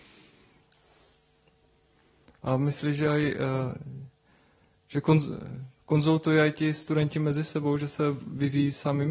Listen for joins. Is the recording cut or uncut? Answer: uncut